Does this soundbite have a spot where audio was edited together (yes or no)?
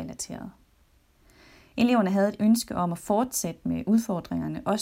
no